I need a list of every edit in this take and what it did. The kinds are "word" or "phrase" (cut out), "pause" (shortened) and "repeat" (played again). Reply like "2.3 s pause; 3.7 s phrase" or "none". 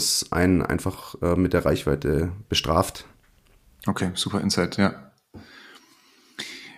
none